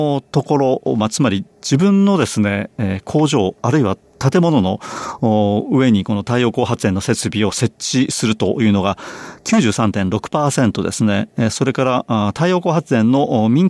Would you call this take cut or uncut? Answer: cut